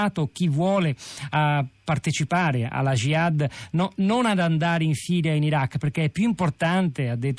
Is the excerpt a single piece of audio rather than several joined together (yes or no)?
yes